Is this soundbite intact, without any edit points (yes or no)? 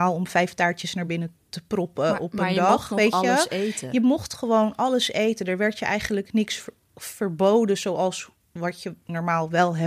yes